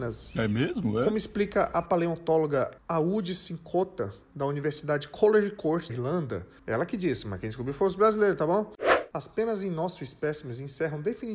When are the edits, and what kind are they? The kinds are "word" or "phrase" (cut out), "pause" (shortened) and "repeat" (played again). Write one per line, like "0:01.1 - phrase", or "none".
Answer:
0:05.9 - word